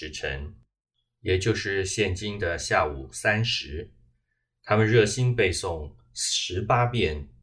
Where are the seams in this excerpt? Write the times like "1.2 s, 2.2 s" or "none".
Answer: none